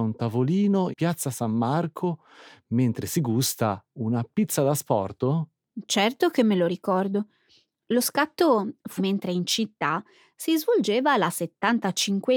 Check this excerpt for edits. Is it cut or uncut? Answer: cut